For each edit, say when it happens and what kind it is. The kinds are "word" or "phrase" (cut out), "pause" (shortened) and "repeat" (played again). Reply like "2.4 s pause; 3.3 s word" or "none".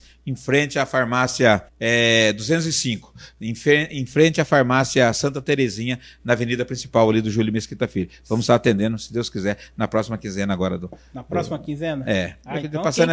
1.7 s pause